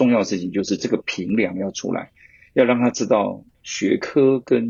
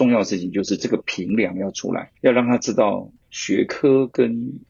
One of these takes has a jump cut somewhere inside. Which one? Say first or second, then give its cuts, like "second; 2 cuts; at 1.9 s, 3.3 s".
second; 1 cut; at 2.2 s